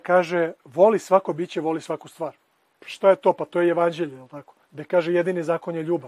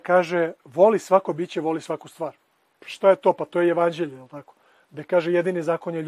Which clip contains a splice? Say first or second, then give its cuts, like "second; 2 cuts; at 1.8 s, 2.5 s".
first; 1 cut; at 4.6 s